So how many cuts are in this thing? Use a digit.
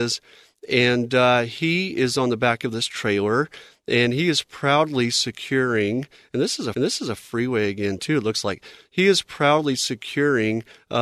1